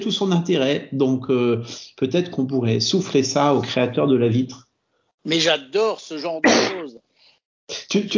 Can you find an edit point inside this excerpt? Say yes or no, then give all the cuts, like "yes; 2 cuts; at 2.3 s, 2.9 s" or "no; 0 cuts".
no; 0 cuts